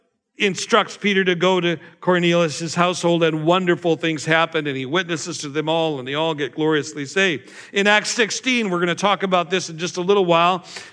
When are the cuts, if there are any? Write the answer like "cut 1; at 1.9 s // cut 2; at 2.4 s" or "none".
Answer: none